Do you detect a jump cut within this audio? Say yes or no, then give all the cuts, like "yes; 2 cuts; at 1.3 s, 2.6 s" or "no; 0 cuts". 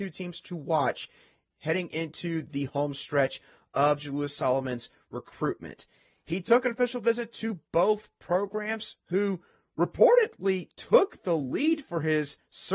no; 0 cuts